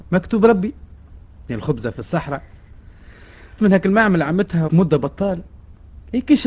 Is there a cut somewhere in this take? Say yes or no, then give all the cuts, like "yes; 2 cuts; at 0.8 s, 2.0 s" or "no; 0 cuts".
yes; 3 cuts; at 1.5 s, 3.6 s, 4.7 s